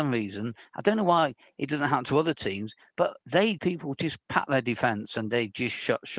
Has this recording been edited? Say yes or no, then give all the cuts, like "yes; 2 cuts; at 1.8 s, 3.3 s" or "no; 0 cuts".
yes; 1 cut; at 3.6 s